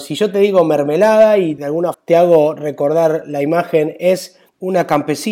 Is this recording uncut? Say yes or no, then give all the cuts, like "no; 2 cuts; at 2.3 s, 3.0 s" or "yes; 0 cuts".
no; 2 cuts; at 1.6 s, 1.9 s